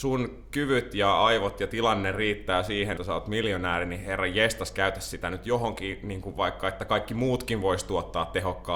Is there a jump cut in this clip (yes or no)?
yes